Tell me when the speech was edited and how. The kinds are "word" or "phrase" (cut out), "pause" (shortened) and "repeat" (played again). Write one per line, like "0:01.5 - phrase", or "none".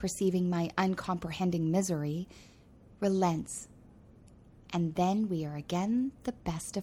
none